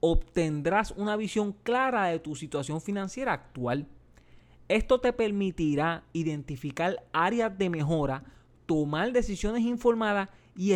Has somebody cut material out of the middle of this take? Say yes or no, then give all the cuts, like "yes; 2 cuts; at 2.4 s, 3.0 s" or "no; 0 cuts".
no; 0 cuts